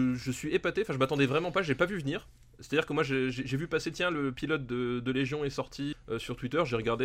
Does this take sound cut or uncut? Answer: cut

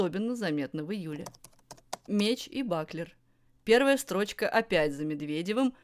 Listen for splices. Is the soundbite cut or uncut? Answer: uncut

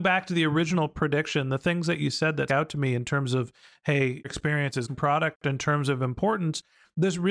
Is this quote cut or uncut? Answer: cut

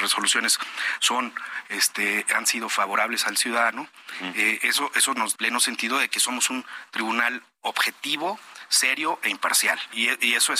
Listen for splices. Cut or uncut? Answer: cut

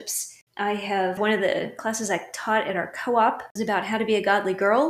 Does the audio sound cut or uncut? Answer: cut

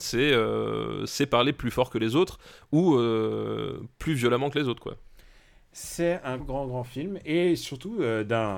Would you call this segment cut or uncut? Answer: cut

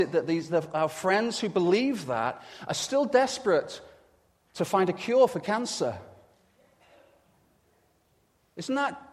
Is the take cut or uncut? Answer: uncut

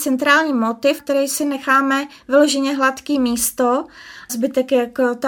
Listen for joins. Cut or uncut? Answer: cut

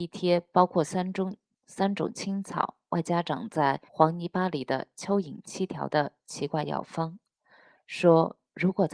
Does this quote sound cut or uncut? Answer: cut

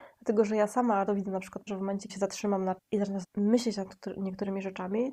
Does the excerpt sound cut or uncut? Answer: cut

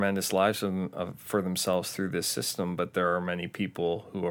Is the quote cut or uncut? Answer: uncut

